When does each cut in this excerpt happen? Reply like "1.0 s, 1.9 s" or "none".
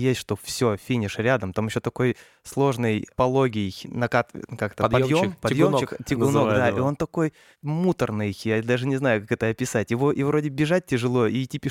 none